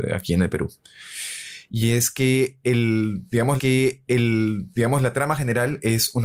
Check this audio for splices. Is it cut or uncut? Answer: cut